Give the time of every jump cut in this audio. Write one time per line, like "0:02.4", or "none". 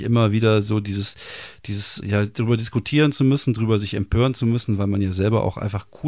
0:02.0

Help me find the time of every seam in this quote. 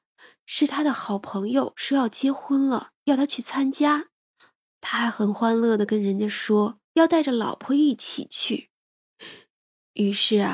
0:06.8

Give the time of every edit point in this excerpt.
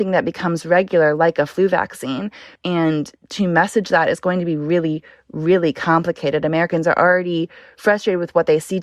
none

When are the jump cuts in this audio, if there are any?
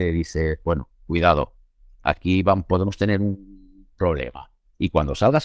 0:00.9

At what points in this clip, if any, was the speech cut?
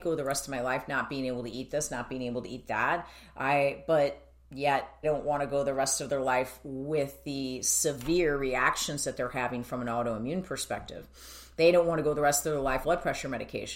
0:05.0
0:12.8

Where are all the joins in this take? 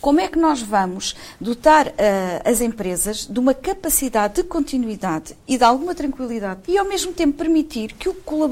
0:06.6

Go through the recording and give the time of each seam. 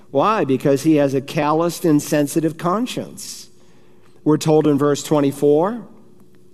none

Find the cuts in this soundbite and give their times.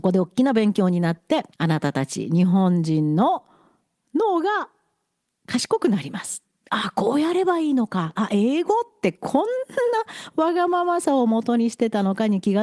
0:01.5

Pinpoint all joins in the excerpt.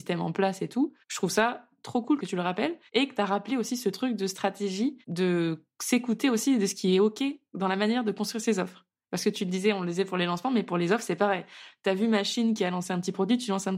0:01.0
0:02.9
0:05.0

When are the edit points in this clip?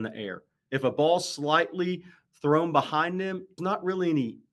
0:03.6

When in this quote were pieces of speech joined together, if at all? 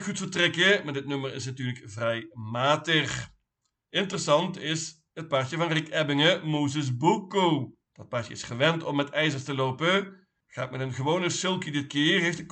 0:07.8

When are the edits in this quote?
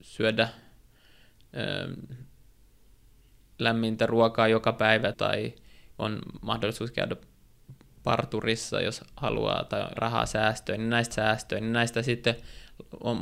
0:05.1
0:10.0
0:11.1

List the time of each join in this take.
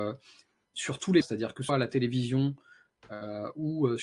0:01.2
0:01.7

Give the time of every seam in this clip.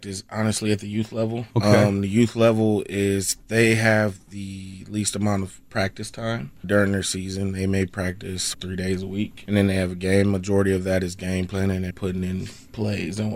0:01.5
0:06.6
0:08.5
0:09.5
0:11.9

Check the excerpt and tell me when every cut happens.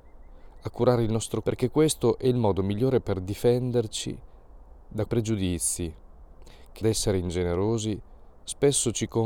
0:01.4
0:05.1
0:06.8

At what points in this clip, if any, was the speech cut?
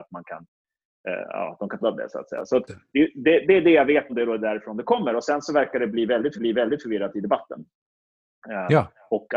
0:01.8
0:02.7
0:04.1
0:06.4

